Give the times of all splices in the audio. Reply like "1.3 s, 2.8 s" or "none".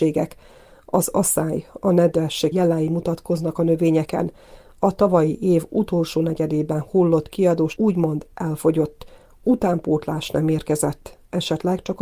2.5 s, 7.8 s